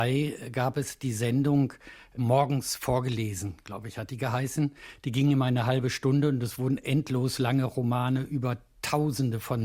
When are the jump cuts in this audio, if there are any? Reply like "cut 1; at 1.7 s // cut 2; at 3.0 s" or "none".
none